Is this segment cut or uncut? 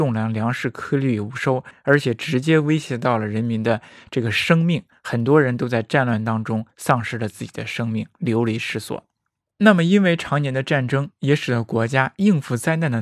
uncut